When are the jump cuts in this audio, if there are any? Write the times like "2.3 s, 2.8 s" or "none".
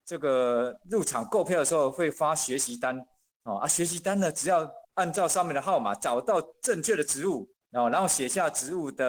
4.8 s, 7.6 s